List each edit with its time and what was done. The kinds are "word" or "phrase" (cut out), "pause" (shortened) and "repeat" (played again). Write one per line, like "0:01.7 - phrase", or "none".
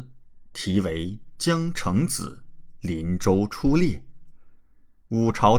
none

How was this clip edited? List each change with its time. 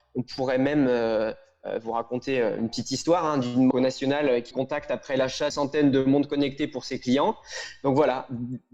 0:03.7 - word
0:04.5 - word
0:05.5 - word

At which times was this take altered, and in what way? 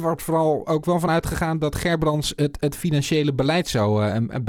none

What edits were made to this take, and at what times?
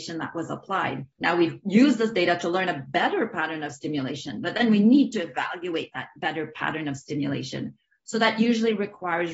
0:01.1 - pause

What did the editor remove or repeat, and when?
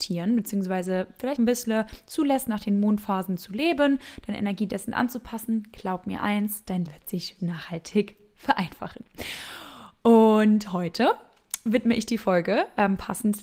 0:01.4 - word
0:06.9 - word
0:07.4 - word

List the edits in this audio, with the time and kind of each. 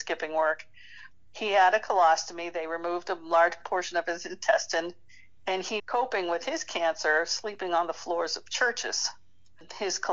0:05.8 - word

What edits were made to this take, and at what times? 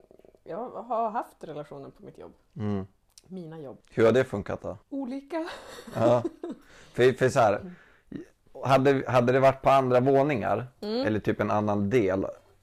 0:03.8 - pause
0:04.8 - pause

